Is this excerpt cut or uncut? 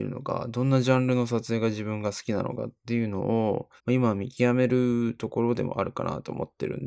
cut